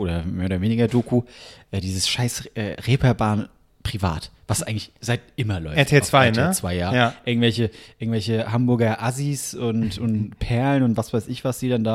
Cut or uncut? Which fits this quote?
uncut